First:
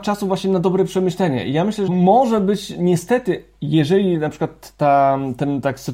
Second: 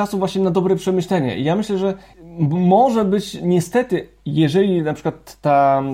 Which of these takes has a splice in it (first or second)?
first